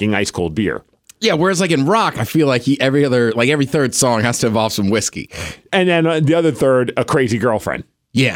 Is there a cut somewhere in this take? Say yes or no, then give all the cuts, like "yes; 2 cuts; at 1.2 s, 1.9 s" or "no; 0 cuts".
no; 0 cuts